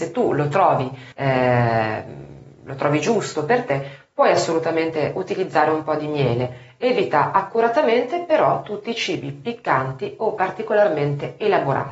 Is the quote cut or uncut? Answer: cut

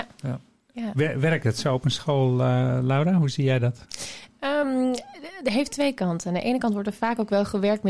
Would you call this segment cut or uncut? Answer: uncut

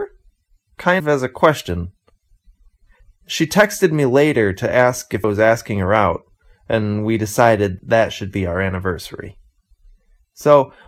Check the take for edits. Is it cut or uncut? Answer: cut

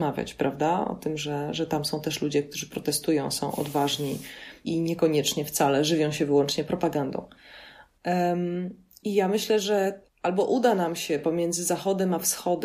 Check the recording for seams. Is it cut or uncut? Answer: cut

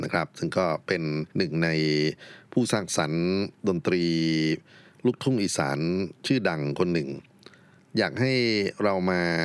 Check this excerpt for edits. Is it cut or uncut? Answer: cut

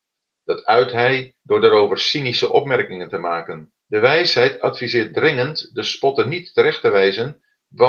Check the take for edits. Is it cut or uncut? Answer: cut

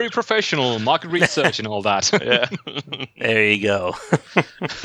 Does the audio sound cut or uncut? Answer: uncut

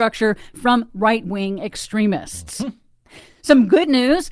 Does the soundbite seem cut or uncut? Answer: uncut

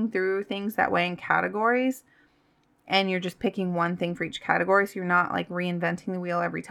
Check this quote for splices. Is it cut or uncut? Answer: uncut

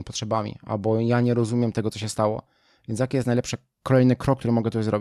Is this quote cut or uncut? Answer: uncut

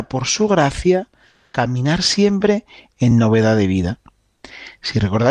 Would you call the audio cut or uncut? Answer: uncut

